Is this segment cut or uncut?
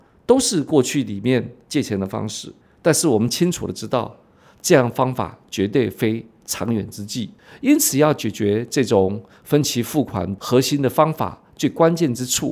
uncut